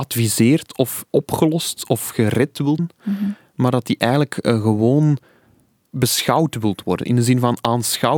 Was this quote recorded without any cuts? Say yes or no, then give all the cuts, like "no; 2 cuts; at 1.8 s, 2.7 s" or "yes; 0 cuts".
no; 2 cuts; at 1.1 s, 2.8 s